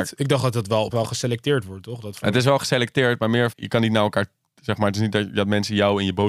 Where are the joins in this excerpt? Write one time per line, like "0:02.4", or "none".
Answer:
0:00.9
0:03.5